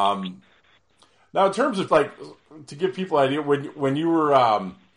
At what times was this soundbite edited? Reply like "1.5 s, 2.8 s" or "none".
1.9 s